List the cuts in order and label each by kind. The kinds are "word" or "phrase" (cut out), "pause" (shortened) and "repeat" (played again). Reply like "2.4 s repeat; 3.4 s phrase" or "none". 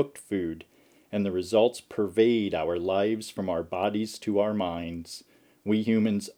none